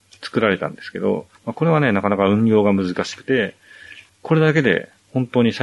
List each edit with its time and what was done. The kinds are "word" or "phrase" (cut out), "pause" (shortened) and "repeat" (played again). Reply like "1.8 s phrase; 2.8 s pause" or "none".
1.4 s pause; 4.1 s pause